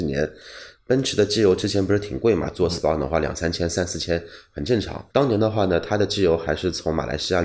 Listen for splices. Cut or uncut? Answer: cut